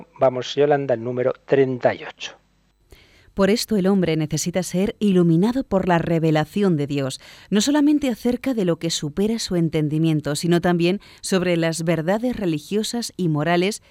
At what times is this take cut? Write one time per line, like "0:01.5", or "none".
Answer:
none